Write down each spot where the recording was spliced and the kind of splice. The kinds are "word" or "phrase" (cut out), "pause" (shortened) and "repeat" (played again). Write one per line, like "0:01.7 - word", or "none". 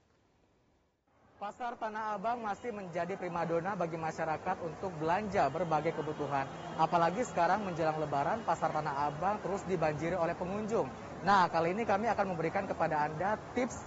none